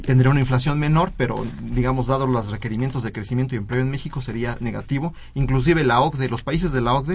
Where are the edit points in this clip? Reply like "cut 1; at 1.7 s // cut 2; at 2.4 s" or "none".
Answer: none